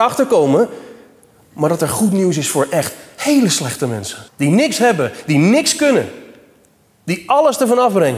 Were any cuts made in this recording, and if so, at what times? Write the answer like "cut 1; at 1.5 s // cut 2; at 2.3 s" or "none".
cut 1; at 4.3 s